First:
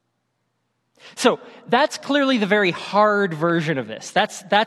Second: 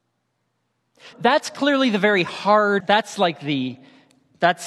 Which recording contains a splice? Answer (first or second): second